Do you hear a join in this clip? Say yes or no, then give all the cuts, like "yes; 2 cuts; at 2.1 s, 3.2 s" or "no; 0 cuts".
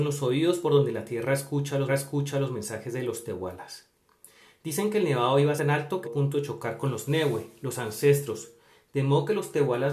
yes; 3 cuts; at 1.9 s, 5.6 s, 6.0 s